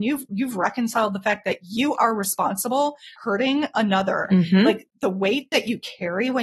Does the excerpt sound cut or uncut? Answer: cut